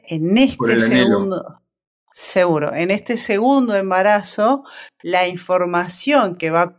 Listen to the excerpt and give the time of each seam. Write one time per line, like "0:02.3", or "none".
none